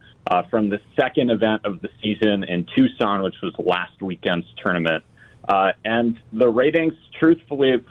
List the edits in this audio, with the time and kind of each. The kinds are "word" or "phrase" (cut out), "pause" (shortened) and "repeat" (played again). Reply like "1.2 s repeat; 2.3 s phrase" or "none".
none